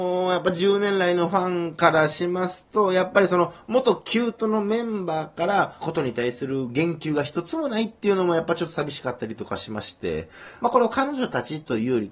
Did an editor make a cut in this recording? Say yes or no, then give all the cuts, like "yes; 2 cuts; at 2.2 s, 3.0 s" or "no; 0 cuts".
yes; 1 cut; at 5.8 s